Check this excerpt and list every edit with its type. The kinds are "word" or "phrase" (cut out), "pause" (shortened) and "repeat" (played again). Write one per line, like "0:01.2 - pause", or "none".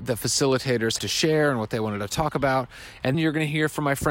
0:01.0 - word
0:03.1 - word